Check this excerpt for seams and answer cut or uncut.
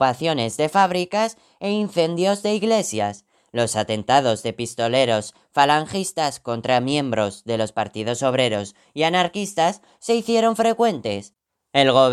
uncut